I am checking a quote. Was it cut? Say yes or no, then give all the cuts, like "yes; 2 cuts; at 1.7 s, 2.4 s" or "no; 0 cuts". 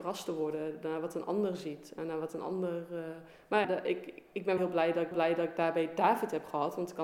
yes; 3 cuts; at 3.6 s, 4.6 s, 5.1 s